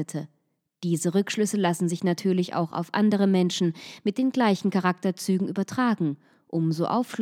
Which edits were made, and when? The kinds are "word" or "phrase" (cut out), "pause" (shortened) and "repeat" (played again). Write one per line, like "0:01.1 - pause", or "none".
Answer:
none